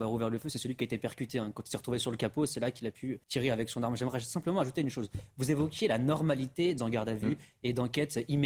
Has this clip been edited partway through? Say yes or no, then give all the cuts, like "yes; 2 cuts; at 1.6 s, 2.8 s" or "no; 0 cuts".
yes; 2 cuts; at 3.2 s, 6.8 s